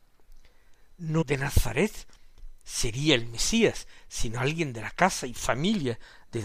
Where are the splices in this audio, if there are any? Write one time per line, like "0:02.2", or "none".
0:01.2
0:02.6